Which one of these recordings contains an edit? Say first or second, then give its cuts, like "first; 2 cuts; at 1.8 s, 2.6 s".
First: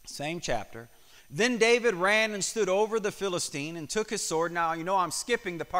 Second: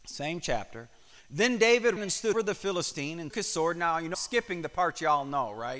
second; 4 cuts; at 2.0 s, 2.3 s, 3.3 s, 4.1 s